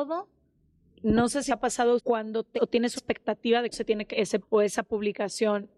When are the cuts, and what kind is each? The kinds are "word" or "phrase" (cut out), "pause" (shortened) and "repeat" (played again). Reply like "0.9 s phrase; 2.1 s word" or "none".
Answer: 1.5 s word; 2.0 s word; 2.6 s word; 3.0 s word; 3.7 s word; 4.1 s word; 4.4 s word